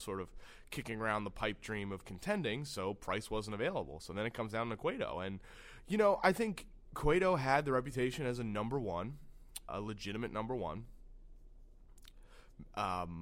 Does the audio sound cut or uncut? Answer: cut